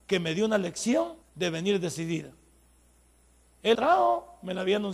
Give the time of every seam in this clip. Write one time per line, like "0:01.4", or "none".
0:01.2
0:03.7